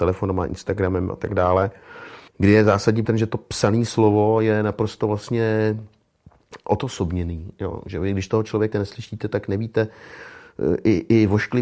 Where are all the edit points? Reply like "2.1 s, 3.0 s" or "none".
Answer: 2.3 s, 3.1 s, 8.7 s